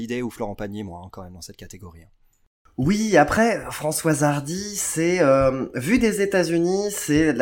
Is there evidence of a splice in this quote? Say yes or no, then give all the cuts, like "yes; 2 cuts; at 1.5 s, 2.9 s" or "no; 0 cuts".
no; 0 cuts